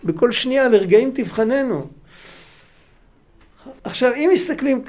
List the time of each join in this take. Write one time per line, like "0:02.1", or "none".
0:03.8